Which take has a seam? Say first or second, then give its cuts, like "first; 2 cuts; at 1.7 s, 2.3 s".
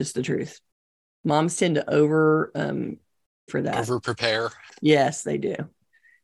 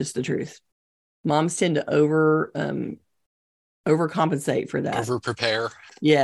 first; 1 cut; at 3.5 s